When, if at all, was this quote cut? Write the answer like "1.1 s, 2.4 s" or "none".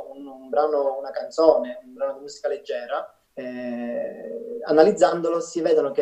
3.2 s